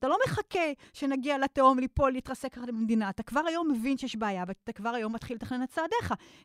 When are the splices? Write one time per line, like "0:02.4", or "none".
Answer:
none

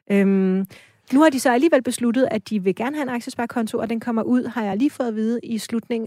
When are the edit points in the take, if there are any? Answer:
none

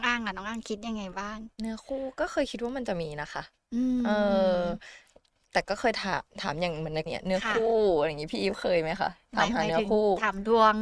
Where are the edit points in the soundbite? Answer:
0:07.1

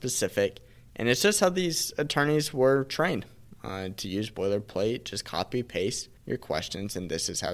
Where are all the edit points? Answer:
0:06.2

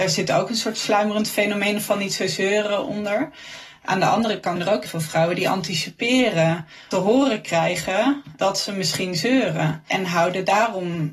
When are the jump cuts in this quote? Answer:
0:04.6
0:04.9
0:06.9

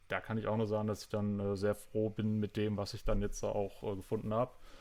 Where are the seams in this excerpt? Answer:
none

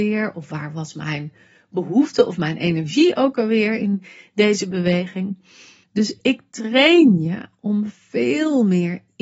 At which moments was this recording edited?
none

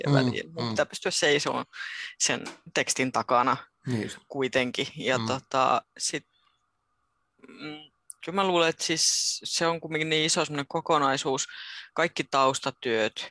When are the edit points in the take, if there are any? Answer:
none

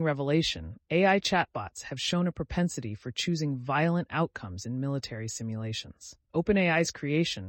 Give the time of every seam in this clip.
0:06.2

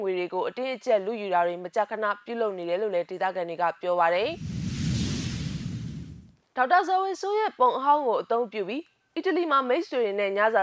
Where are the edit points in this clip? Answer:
none

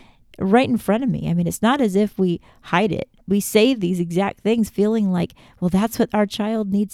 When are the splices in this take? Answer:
none

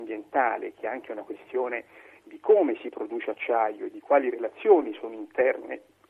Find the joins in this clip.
none

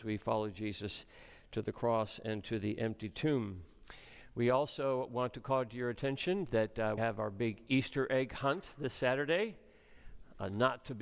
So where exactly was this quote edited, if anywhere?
0:07.0

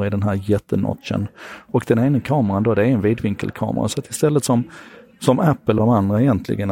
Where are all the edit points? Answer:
0:05.8

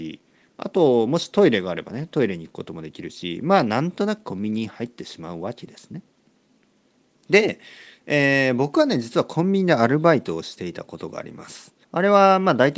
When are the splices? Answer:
0:11.8

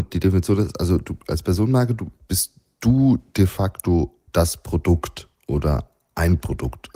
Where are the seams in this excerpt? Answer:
0:02.2
0:04.3

